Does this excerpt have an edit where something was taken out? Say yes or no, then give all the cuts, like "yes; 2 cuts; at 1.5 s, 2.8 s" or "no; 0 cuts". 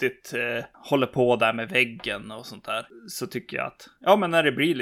no; 0 cuts